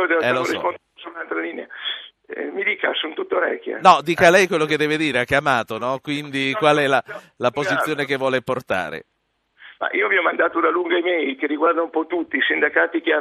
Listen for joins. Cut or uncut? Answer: uncut